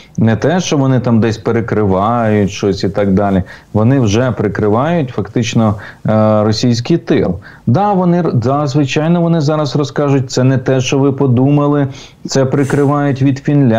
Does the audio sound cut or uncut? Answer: uncut